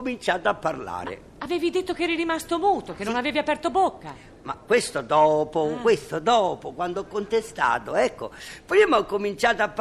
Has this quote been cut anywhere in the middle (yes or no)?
no